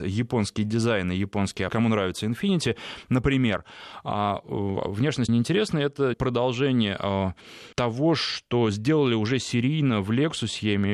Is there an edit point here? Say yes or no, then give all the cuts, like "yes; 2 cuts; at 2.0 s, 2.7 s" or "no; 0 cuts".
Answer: yes; 4 cuts; at 1.7 s, 5.3 s, 6.1 s, 7.7 s